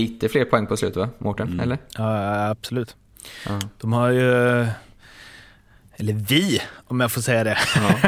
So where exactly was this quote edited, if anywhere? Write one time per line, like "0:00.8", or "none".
none